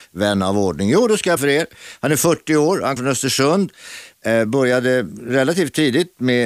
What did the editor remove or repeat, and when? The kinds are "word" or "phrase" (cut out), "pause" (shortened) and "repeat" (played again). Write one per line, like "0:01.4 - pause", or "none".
0:01.4 - word
0:03.0 - word